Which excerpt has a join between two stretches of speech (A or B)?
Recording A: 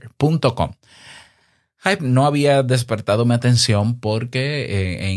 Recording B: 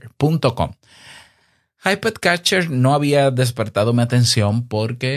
A